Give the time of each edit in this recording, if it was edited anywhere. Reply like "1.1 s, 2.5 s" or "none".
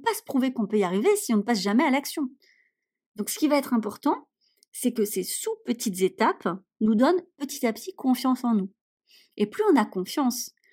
none